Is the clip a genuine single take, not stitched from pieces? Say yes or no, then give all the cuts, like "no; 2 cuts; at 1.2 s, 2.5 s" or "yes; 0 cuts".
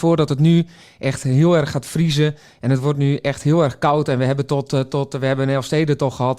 yes; 0 cuts